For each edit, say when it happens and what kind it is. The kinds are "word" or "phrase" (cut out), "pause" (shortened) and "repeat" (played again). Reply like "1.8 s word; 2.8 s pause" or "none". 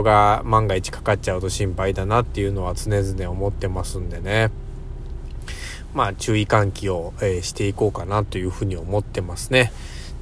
none